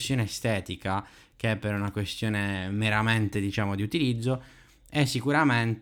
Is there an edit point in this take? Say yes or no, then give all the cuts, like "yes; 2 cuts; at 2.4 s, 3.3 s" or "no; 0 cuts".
no; 0 cuts